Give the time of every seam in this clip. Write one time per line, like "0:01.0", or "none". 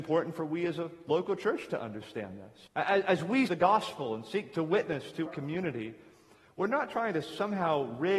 0:02.7
0:03.5
0:05.3

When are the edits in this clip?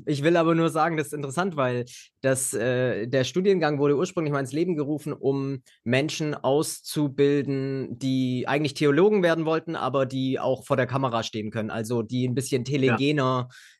none

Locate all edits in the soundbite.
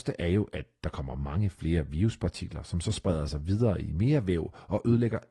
none

